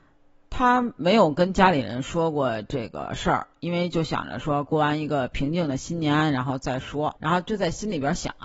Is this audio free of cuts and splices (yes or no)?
no